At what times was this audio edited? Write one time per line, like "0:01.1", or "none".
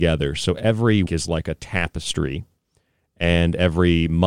0:01.1